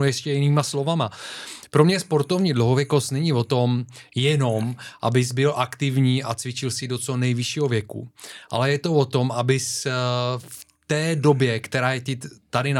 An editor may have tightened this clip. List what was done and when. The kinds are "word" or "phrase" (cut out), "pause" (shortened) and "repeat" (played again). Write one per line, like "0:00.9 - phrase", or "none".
0:10.7 - pause